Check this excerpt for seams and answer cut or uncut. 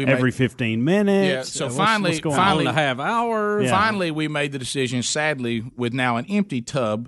uncut